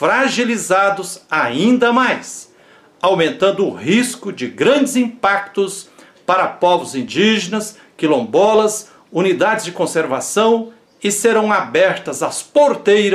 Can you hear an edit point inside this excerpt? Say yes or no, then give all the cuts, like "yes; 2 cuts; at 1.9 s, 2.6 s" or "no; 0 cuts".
no; 0 cuts